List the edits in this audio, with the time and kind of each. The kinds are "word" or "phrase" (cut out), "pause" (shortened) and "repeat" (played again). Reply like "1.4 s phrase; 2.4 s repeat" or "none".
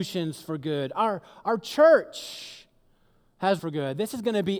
3.6 s word